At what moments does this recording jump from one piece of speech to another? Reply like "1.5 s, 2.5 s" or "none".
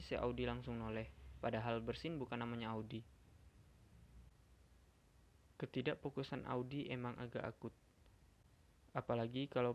none